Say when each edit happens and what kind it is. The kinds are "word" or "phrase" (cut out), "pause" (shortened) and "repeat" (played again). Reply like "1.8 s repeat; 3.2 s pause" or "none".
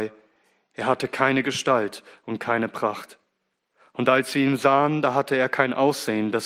none